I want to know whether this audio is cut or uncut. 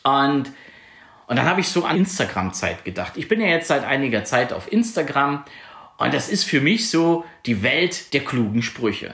cut